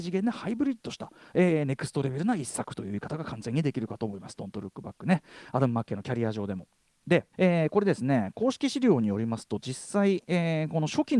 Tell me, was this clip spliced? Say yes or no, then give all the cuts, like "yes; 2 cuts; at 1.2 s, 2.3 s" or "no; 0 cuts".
yes; 1 cut; at 7.3 s